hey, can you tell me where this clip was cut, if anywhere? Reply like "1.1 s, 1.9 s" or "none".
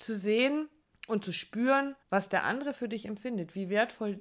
0.9 s, 2.0 s